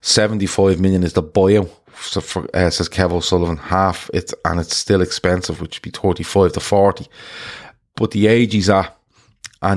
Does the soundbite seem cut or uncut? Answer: uncut